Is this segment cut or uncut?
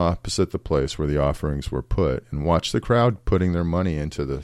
uncut